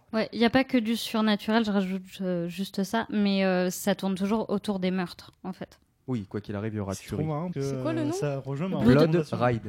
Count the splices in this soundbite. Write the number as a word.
one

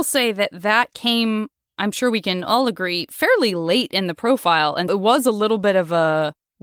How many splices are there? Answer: one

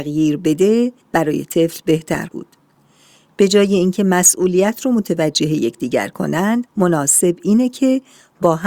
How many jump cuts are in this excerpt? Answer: three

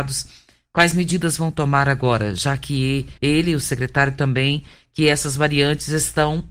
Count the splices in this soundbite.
one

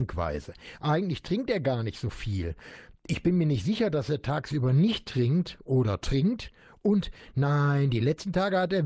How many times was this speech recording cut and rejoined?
zero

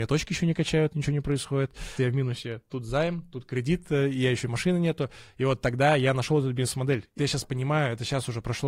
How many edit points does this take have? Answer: two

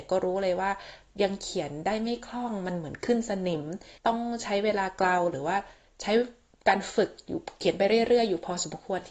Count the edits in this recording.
one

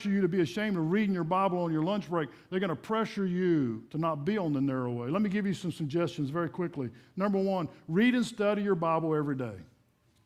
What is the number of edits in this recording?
one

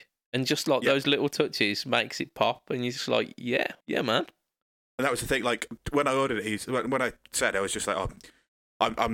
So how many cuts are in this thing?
two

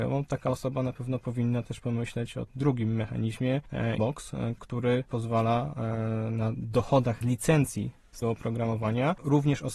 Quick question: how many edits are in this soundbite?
four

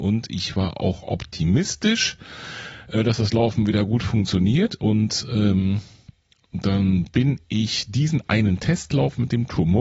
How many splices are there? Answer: zero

